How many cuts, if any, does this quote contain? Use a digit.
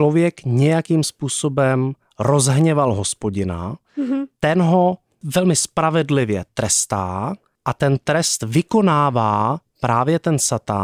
0